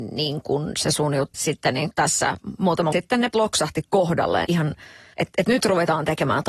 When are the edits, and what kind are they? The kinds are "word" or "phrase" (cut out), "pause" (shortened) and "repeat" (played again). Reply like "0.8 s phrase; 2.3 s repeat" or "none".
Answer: 1.3 s word; 1.9 s word; 2.9 s word; 3.3 s word; 4.4 s word

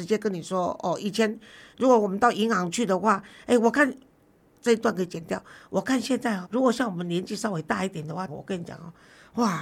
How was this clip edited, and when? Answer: 6.4 s word; 8.3 s phrase

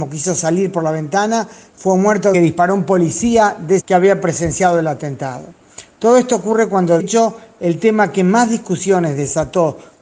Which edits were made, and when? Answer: 2.3 s phrase; 3.8 s word; 7.0 s word

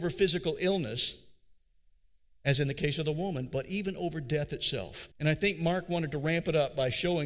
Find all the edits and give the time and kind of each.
5.1 s pause

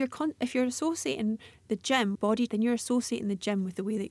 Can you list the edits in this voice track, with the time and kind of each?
2.1 s word; 2.5 s word

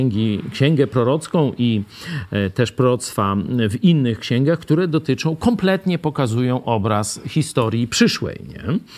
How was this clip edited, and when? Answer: none

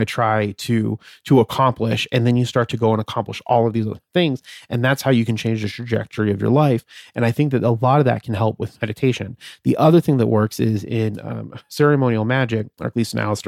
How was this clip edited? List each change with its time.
none

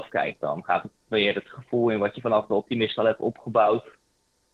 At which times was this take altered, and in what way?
none

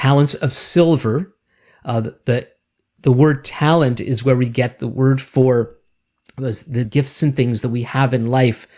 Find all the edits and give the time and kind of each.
6.8 s word

